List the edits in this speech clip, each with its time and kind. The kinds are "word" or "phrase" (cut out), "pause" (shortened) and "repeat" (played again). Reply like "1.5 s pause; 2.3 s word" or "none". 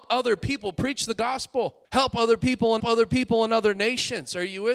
1.8 s pause; 2.8 s repeat